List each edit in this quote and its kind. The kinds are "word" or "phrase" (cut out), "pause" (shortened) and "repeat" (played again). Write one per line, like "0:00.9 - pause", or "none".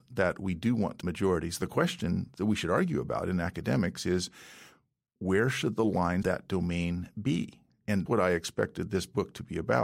0:01.0 - word
0:06.2 - word
0:08.1 - word

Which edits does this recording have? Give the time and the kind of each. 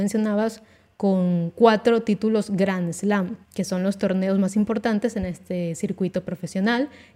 0:03.4 - pause

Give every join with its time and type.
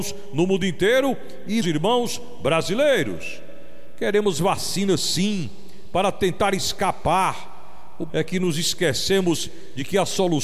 0:01.6 - word
0:08.1 - word

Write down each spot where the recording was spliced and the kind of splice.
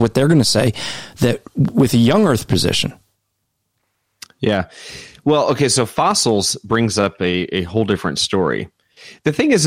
none

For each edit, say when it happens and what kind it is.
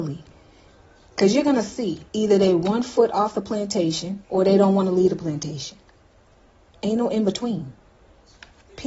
0:02.1 - pause
0:04.2 - pause
0:06.3 - pause

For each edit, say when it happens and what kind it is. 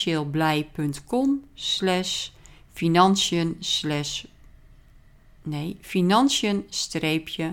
none

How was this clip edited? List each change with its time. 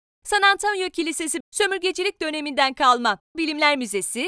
0:01.4 - word
0:03.3 - word

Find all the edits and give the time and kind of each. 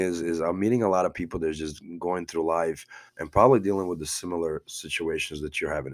0:03.1 - pause

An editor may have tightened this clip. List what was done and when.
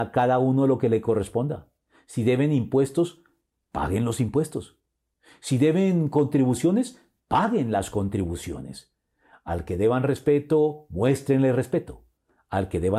none

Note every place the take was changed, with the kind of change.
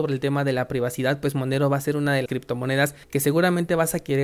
0:02.3 - word
0:03.0 - pause

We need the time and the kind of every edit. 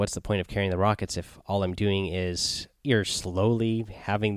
0:02.8 - pause

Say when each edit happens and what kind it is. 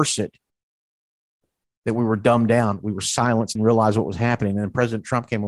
0:03.6 - phrase

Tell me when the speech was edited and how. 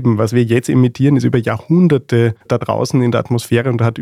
none

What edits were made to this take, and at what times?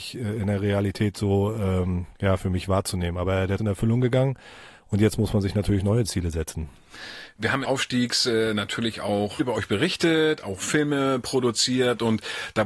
0:02.1 - pause
0:03.6 - phrase
0:07.6 - phrase
0:09.4 - phrase

